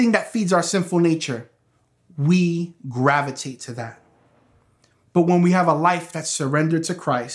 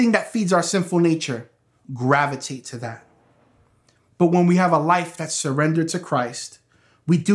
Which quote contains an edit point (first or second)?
second